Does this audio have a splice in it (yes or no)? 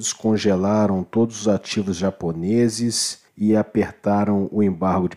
yes